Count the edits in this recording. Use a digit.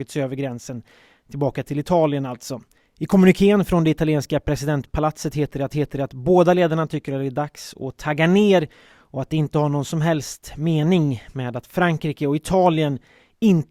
1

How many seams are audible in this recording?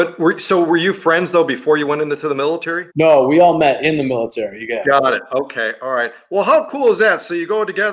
1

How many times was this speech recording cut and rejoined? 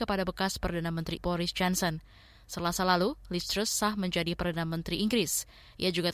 1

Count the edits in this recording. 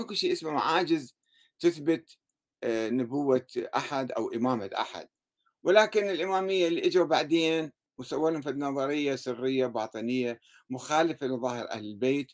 0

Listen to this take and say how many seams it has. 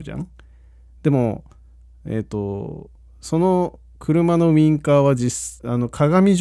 0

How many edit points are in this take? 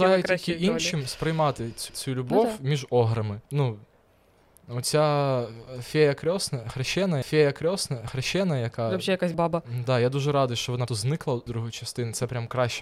6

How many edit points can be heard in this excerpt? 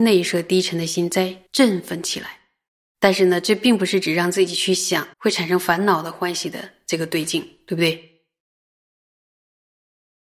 3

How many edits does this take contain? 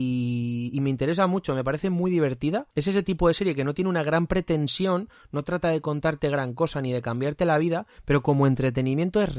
1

